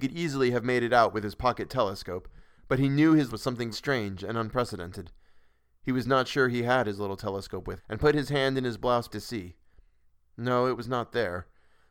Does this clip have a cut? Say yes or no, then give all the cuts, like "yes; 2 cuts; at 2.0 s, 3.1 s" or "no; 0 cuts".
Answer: yes; 4 cuts; at 3.3 s, 3.7 s, 7.8 s, 9.1 s